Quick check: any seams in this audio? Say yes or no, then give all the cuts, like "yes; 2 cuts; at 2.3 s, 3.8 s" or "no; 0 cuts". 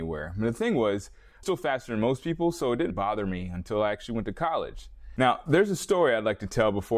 yes; 2 cuts; at 1.4 s, 2.9 s